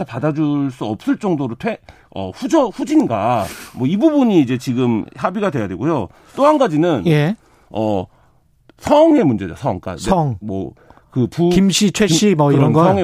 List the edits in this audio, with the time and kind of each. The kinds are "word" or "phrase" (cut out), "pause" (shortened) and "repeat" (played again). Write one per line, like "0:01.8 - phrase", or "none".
none